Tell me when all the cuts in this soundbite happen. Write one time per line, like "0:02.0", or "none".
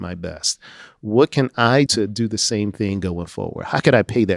0:01.9